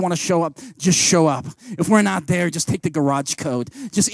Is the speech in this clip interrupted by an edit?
no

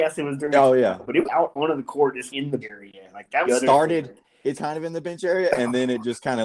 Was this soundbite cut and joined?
yes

